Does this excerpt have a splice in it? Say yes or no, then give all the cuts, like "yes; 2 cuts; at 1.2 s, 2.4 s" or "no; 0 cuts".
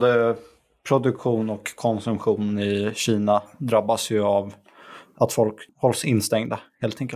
yes; 1 cut; at 5.7 s